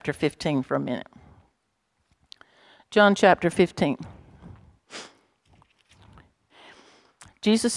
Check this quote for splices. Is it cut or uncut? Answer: uncut